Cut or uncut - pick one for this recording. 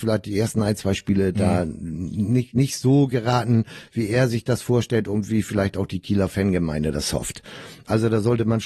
uncut